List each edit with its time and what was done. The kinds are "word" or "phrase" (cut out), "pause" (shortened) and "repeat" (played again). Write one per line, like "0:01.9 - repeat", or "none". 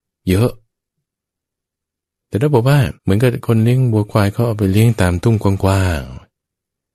0:03.0 - pause